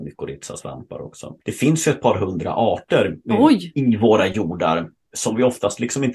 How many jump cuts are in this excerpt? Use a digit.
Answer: 1